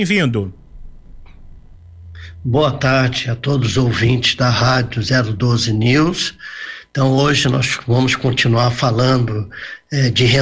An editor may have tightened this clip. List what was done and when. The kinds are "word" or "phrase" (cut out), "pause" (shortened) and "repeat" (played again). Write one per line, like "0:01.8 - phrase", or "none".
none